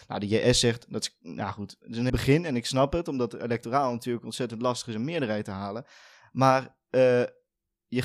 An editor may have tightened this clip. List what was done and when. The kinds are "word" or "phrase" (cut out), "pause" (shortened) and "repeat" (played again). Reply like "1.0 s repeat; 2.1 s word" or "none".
2.1 s word